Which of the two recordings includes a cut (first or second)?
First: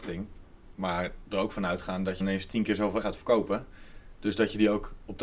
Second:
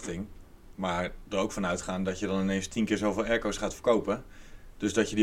first